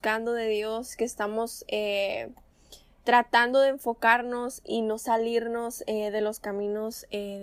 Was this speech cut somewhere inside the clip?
no; 0 cuts

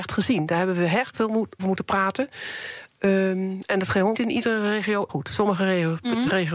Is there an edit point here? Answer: yes; 4 cuts; at 1.1 s, 1.6 s, 4.1 s, 5.1 s

